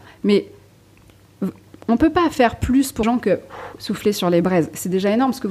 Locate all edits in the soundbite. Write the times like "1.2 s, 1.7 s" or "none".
3.0 s